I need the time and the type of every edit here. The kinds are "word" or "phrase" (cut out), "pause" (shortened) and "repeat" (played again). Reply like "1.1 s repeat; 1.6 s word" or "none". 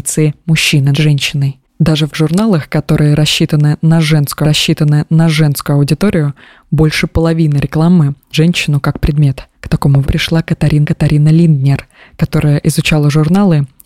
0.9 s word; 2.1 s word; 4.4 s repeat; 8.3 s word; 9.5 s pause; 10.0 s word; 10.8 s repeat

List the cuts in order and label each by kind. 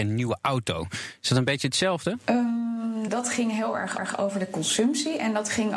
3.1 s phrase; 4.0 s repeat

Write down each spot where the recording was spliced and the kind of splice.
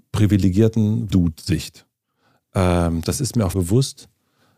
1.1 s word; 3.5 s word

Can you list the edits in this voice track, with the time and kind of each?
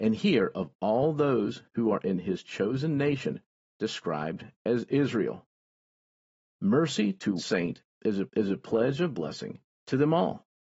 7.4 s word; 8.3 s repeat

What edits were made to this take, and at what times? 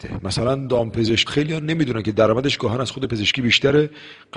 1.3 s word

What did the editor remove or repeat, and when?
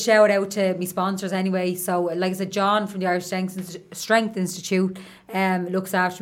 none

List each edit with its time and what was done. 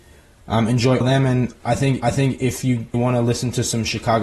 1.0 s word; 1.6 s pause; 2.0 s repeat; 2.9 s phrase

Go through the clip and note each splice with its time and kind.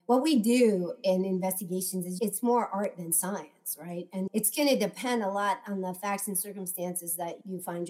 4.3 s word

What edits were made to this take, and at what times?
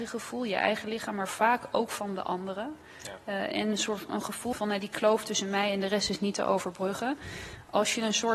3.5 s word; 4.1 s word; 4.5 s word

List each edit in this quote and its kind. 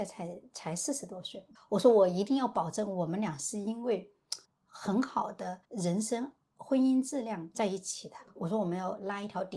1.6 s pause; 4.5 s pause; 5.6 s pause

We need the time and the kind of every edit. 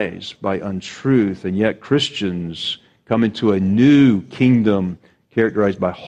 none

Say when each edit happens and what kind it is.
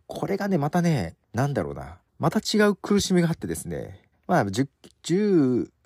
1.2 s pause; 2.1 s pause; 4.1 s pause

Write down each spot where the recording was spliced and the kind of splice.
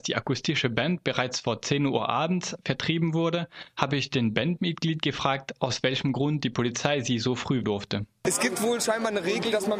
7.6 s word

